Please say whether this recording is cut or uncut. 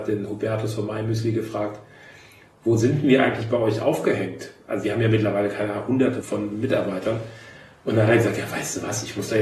cut